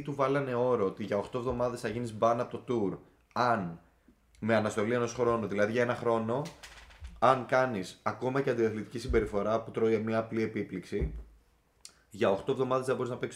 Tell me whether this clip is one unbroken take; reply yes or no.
yes